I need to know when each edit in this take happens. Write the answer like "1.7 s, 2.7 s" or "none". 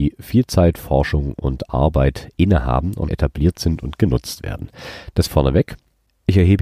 3.1 s, 5.3 s